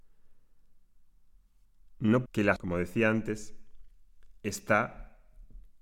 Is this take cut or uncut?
cut